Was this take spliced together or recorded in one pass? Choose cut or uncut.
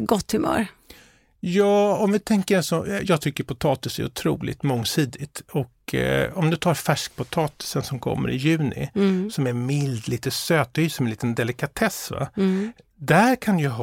uncut